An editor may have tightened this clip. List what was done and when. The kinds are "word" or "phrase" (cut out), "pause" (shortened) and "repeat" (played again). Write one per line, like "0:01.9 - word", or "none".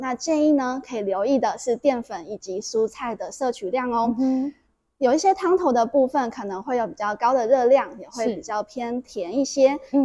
none